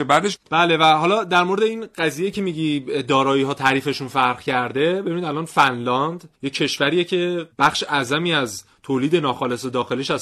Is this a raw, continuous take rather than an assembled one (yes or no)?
no